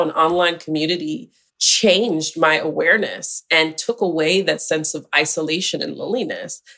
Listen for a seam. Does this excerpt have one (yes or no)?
yes